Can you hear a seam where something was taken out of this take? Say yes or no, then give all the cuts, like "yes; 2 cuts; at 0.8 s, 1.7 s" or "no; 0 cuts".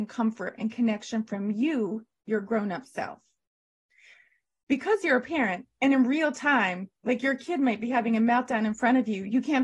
no; 0 cuts